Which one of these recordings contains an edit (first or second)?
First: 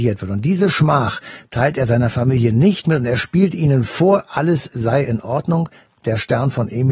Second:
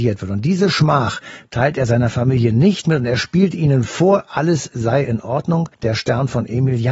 second